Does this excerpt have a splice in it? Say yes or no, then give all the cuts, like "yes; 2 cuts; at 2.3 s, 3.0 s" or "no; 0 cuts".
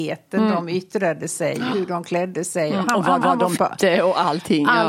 yes; 3 cuts; at 1.7 s, 3.2 s, 3.6 s